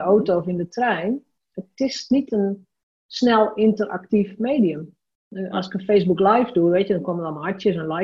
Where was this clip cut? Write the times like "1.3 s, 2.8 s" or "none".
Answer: none